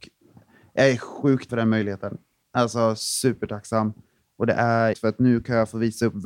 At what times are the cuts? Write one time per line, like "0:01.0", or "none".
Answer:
0:01.5
0:04.9